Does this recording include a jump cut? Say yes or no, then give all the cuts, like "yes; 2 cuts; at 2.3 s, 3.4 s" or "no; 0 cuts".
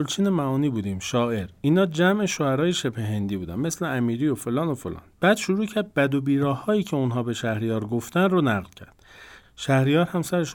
no; 0 cuts